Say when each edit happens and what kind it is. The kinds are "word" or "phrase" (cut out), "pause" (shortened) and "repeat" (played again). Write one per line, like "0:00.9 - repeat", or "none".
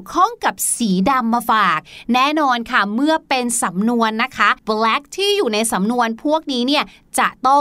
0:04.6 - pause